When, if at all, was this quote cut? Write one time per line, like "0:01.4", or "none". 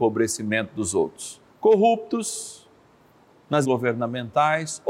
0:01.4
0:03.6